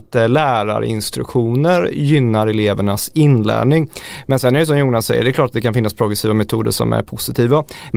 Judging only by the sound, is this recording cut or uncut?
uncut